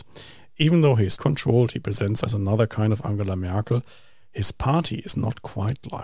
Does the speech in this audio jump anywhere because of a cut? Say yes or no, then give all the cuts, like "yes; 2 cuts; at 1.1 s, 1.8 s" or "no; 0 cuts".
yes; 2 cuts; at 1.2 s, 2.2 s